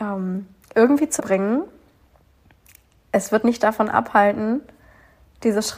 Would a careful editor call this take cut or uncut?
cut